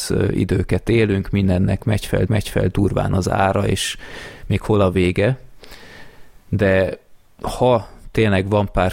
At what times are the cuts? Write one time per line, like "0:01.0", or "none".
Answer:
0:02.3